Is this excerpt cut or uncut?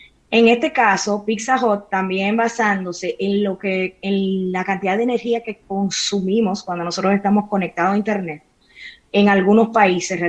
uncut